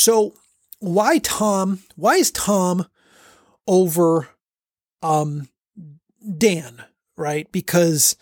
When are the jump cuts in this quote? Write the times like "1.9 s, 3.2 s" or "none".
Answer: none